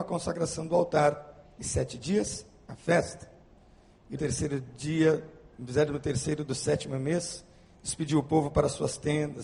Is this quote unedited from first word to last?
no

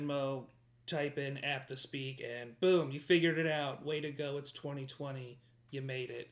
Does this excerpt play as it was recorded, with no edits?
yes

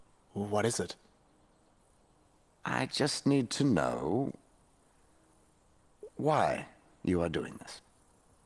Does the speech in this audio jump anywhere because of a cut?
no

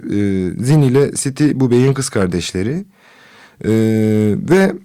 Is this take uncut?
yes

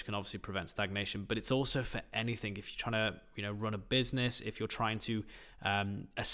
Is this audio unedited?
yes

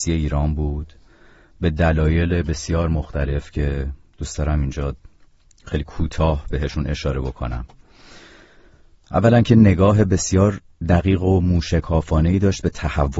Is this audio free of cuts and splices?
yes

